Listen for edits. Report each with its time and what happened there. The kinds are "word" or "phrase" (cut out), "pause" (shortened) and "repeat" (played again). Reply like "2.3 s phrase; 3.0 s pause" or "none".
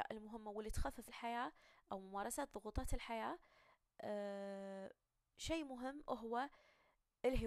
1.1 s phrase